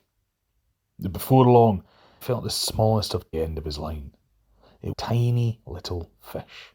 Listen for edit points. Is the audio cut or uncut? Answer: cut